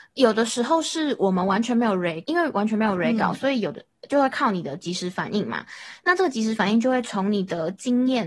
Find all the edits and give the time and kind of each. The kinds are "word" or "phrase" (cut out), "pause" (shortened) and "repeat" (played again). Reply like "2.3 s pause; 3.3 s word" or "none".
2.2 s word